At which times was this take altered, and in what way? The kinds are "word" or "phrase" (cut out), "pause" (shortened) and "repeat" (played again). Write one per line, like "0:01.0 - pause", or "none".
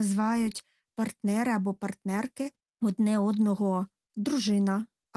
none

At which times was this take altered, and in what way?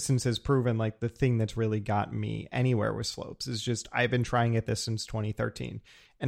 none

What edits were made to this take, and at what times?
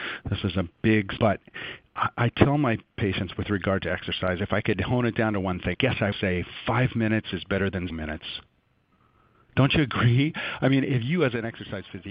0:01.2 - word
0:05.7 - word
0:06.1 - word
0:07.9 - word

